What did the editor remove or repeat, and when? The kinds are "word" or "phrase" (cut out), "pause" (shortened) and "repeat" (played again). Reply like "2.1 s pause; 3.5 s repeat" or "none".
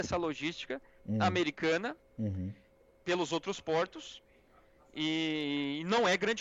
none